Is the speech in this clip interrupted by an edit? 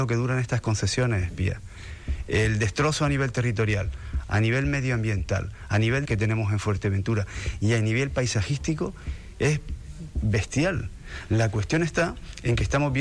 yes; 1 cut; at 6.0 s

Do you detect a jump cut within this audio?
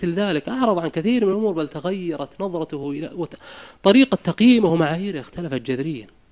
no; 0 cuts

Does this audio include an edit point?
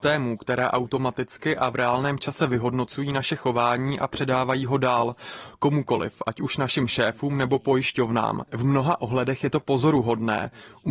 no; 0 cuts

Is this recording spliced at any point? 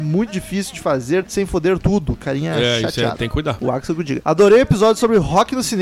no; 0 cuts

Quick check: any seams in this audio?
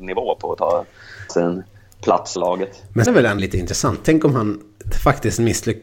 yes; 4 cuts; at 1.3 s, 2.4 s, 3.1 s, 3.4 s

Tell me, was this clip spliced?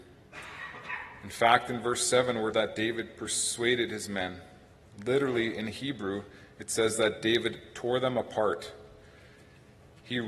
yes; 1 cut; at 2.5 s

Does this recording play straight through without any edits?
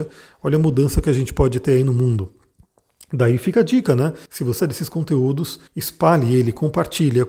no; 3 cuts; at 4.3 s, 4.6 s, 5.7 s

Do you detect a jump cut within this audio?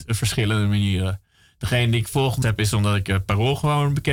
yes; 1 cut; at 2.4 s

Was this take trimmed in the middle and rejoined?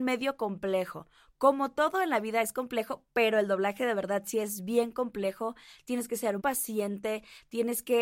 yes; 1 cut; at 6.4 s

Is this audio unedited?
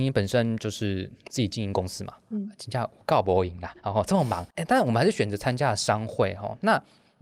no; 1 cut; at 4.5 s

